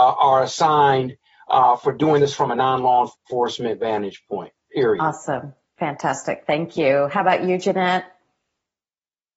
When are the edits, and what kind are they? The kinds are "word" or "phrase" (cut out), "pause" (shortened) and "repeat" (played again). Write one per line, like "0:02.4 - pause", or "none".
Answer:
0:03.1 - pause
0:04.6 - pause